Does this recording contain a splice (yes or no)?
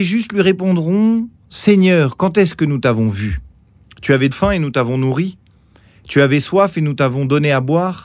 yes